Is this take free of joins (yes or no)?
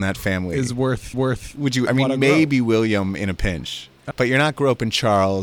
no